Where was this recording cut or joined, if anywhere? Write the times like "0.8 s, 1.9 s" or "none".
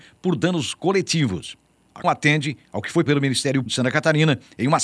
2.0 s, 3.1 s, 3.7 s

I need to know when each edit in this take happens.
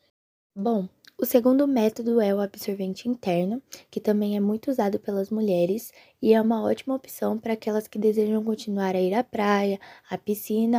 none

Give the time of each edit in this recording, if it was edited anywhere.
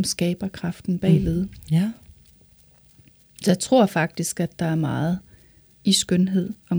none

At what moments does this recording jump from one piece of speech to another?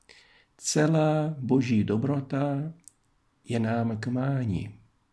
none

